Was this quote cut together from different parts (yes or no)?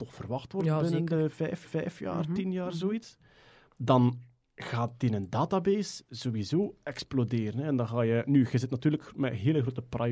yes